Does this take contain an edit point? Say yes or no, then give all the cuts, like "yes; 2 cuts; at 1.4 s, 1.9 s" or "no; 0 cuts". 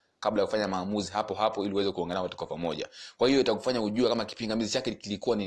no; 0 cuts